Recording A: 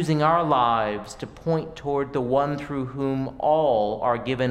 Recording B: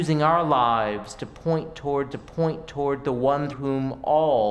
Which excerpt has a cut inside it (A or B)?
B